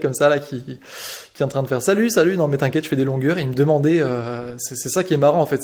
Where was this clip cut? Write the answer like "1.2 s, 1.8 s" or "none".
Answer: none

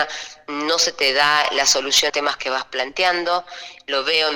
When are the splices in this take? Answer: 2.1 s

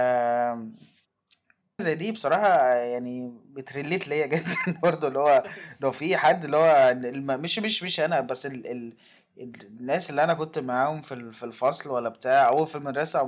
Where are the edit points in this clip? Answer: 1.8 s

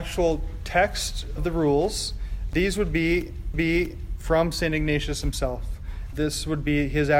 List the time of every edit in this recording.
1.4 s, 3.5 s

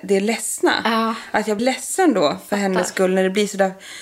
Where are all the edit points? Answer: 1.6 s

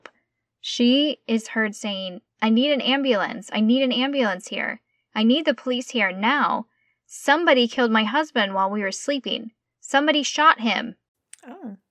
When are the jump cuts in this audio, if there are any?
none

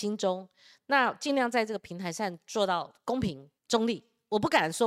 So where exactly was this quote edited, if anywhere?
3.6 s

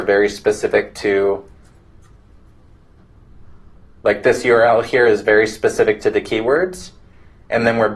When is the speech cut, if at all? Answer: none

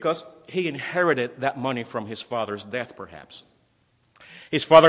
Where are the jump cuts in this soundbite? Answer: none

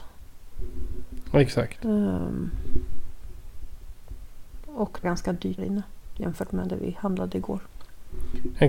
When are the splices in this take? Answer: 5.0 s, 5.6 s

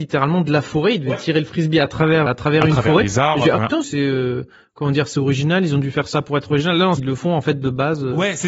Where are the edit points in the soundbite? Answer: 2.3 s, 3.8 s, 7.0 s

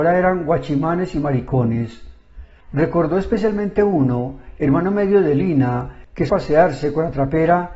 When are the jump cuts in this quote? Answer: 6.3 s

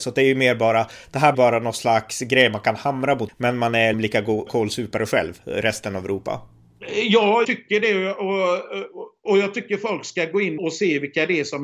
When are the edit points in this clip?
1.3 s, 3.3 s, 3.9 s, 4.5 s, 7.4 s, 9.3 s, 10.6 s

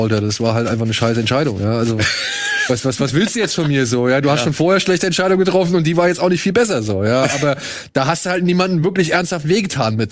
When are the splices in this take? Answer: none

